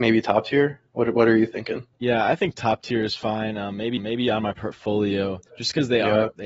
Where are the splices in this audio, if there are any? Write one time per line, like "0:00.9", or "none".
0:01.9
0:04.0
0:05.5